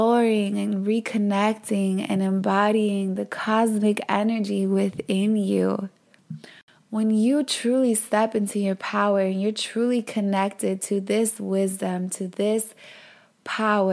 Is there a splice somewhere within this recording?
no; 0 cuts

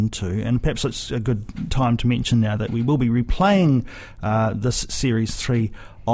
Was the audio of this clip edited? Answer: no; 0 cuts

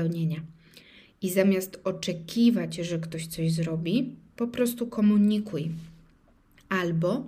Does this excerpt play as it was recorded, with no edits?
yes; 0 cuts

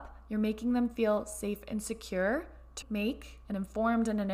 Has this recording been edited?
yes; 1 cut; at 2.8 s

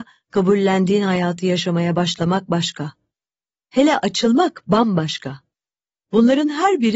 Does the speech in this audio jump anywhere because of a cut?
no; 0 cuts

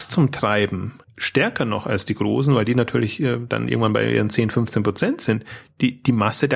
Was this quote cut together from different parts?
yes; 1 cut; at 1.0 s

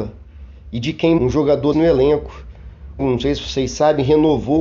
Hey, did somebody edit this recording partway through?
yes; 3 cuts; at 1.2 s, 1.7 s, 3.0 s

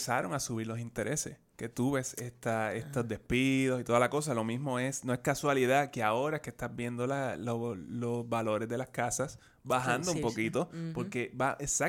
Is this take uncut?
yes; 0 cuts

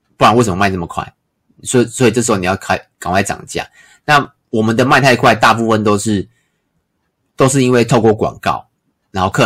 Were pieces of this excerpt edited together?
no; 0 cuts

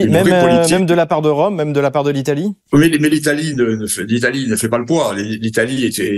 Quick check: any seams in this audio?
yes; 1 cut; at 2.6 s

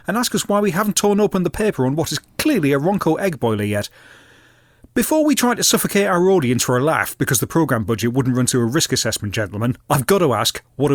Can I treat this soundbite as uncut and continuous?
yes; 0 cuts

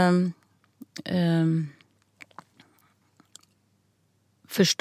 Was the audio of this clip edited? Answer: no; 0 cuts

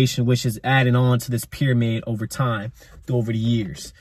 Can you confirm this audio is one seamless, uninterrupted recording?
yes; 0 cuts

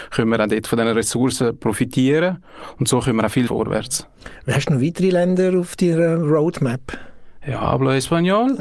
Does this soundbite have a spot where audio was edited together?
yes; 1 cut; at 3.5 s

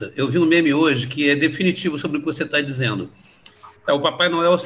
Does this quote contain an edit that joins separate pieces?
yes; 1 cut; at 3.8 s

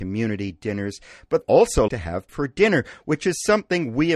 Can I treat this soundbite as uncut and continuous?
no; 3 cuts; at 1.4 s, 1.9 s, 2.3 s

